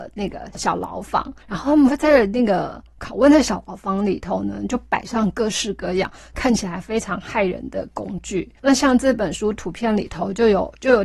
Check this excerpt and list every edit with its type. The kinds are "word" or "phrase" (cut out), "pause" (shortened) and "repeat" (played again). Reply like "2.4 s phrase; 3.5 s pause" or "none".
1.4 s pause